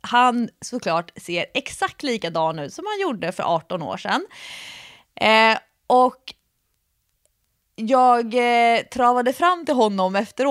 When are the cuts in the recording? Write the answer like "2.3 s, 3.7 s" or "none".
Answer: none